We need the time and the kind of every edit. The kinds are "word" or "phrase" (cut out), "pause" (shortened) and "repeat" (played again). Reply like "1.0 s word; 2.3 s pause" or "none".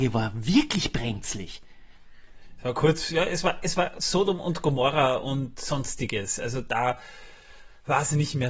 none